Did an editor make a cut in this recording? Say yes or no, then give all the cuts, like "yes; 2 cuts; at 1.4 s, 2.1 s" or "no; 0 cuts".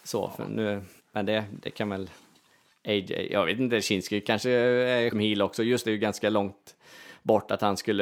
yes; 3 cuts; at 1.0 s, 5.1 s, 5.8 s